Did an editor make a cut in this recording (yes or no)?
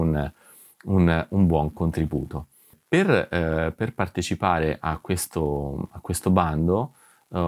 no